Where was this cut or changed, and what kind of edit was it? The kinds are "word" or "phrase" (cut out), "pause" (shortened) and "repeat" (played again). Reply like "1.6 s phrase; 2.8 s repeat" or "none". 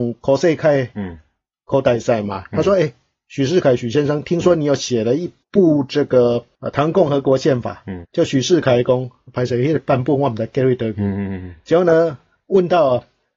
8.0 s word